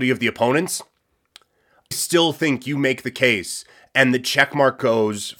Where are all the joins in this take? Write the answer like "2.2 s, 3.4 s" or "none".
1.9 s